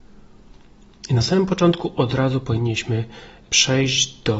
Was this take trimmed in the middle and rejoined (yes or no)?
no